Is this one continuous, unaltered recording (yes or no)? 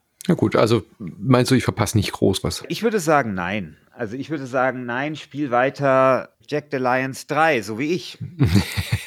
no